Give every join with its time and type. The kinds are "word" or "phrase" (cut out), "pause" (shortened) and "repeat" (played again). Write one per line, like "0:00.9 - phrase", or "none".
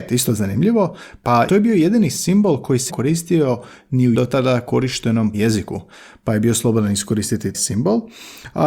0:01.5 - word
0:02.9 - word
0:04.1 - word
0:05.3 - word
0:07.5 - word